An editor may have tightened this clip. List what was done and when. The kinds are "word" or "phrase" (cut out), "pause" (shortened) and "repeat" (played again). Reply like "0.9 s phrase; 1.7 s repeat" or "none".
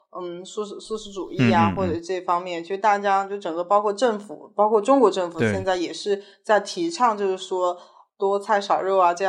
none